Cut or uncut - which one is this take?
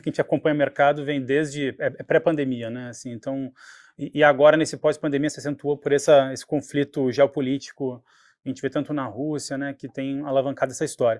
uncut